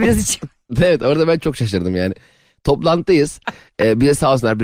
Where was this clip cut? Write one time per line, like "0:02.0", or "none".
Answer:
none